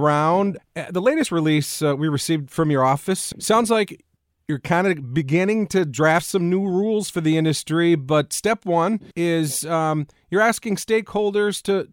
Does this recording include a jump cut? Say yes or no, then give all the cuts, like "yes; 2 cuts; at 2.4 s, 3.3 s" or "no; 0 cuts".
yes; 1 cut; at 9.1 s